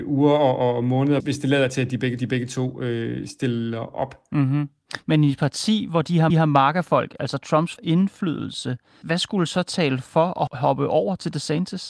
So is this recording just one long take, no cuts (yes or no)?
no